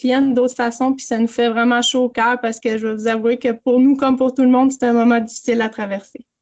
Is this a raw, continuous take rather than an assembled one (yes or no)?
yes